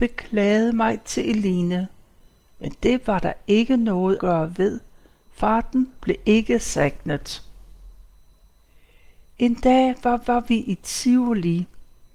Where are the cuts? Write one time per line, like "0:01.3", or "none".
0:04.2
0:10.2

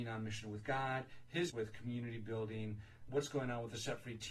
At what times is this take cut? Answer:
0:01.5
0:03.1

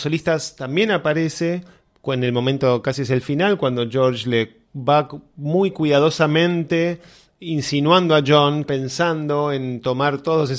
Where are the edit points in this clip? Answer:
0:04.7
0:08.7

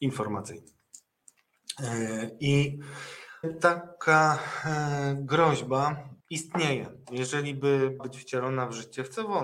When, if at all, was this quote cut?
0:03.4
0:06.2
0:08.0

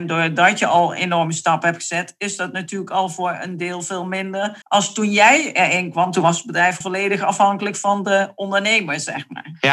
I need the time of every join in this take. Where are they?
0:04.6
0:06.8

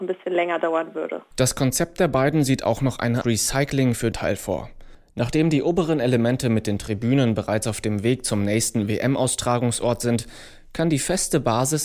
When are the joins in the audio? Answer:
0:03.2
0:04.1

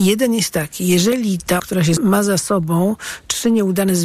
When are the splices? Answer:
0:01.6
0:02.0

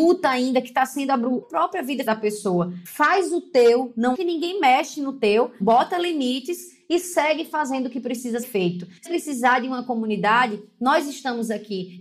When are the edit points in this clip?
0:01.4
0:02.1
0:04.1
0:05.6
0:08.4
0:09.1

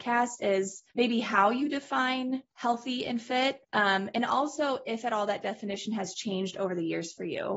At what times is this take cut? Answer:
0:00.9
0:02.5
0:03.6

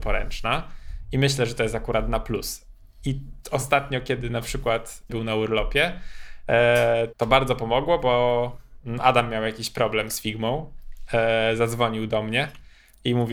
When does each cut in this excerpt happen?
0:05.1
0:07.1

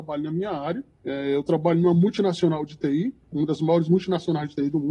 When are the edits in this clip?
0:00.9

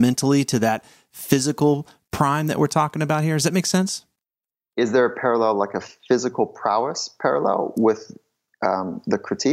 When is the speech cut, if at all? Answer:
none

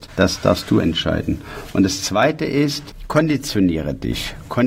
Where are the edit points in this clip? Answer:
none

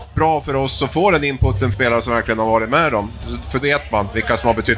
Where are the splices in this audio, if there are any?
0:01.7
0:03.6

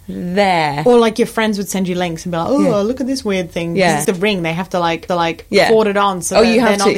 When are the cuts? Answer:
0:04.0
0:05.1

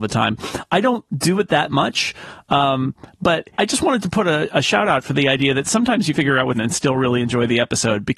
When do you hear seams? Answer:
0:03.5
0:06.1
0:06.5

